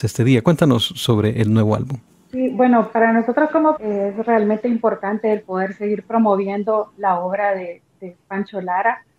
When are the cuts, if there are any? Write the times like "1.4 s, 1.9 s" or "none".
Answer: 3.8 s